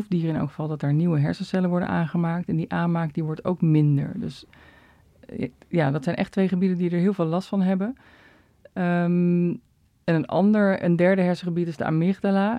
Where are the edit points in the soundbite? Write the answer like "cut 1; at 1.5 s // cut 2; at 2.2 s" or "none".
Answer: none